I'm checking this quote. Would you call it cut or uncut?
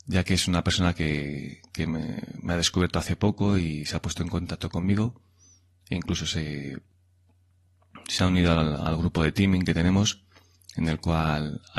uncut